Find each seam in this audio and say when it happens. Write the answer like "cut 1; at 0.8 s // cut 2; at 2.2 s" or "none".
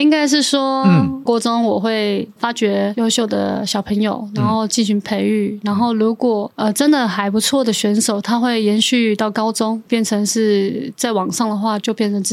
cut 1; at 1.3 s // cut 2; at 9.9 s